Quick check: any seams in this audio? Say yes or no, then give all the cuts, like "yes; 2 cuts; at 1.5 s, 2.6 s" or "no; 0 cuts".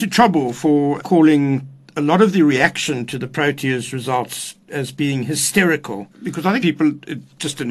yes; 4 cuts; at 1.0 s, 4.6 s, 6.1 s, 6.6 s